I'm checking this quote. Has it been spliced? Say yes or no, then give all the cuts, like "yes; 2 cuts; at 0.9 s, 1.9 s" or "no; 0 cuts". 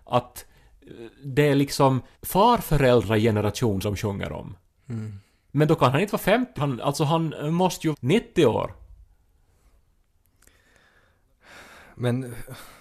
yes; 4 cuts; at 2.1 s, 3.8 s, 6.6 s, 7.9 s